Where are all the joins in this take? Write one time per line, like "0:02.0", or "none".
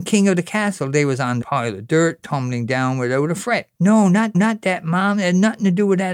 0:01.4
0:03.7
0:04.3